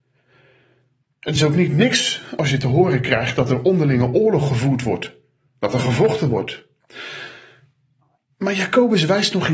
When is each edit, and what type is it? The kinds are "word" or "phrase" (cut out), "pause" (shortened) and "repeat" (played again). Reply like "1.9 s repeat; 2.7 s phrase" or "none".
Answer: none